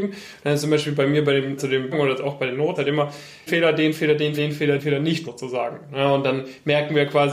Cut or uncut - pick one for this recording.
cut